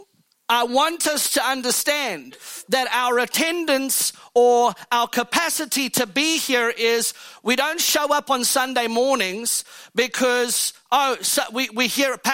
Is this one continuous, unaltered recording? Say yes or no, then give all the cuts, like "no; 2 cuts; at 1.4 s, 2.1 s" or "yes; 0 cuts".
yes; 0 cuts